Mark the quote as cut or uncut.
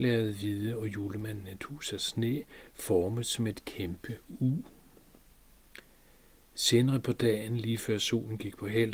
uncut